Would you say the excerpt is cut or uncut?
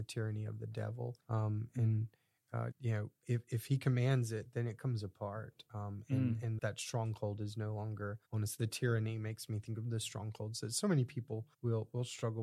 cut